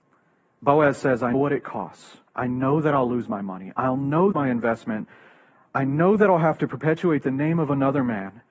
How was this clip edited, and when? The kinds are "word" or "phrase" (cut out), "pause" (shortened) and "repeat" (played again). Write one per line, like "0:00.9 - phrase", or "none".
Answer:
0:01.3 - word
0:02.3 - pause
0:04.3 - phrase

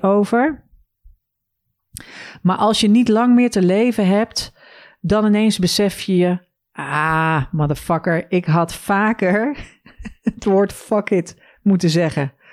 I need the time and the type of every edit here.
none

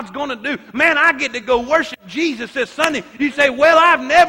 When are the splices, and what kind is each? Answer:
none

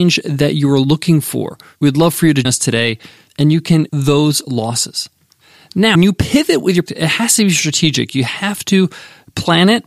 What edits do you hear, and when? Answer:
0:02.4 - word
0:03.9 - word
0:05.9 - word
0:06.9 - word

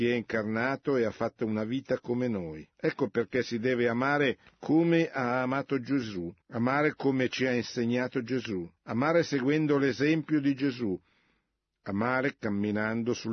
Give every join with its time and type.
0:02.7 - pause
0:04.5 - pause
0:06.4 - pause
0:08.8 - pause

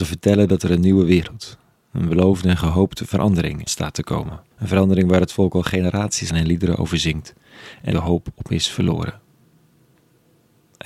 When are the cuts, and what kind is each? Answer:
0:03.7 - word
0:04.5 - pause
0:06.3 - phrase
0:07.9 - phrase

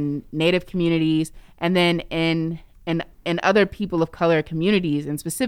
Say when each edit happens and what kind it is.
0:03.1 - pause

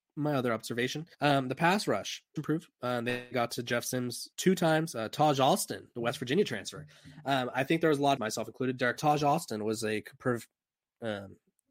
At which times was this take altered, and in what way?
0:01.1 - pause
0:02.4 - word
0:04.3 - pause
0:08.2 - phrase
0:09.0 - phrase

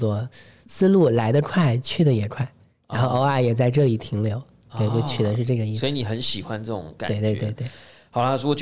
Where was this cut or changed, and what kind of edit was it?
none

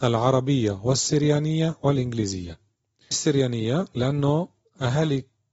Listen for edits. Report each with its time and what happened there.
0:03.1 - word

